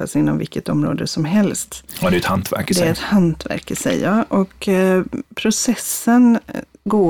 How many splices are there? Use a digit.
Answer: 0